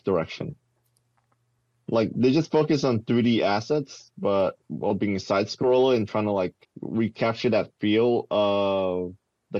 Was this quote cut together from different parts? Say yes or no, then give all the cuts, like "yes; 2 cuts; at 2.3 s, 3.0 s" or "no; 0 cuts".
yes; 1 cut; at 6.6 s